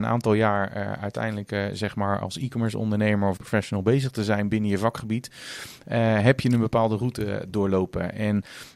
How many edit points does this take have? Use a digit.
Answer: 2